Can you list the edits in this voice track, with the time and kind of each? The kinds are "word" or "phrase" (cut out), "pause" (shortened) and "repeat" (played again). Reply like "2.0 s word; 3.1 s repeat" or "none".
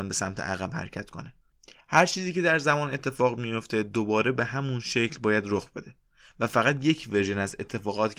none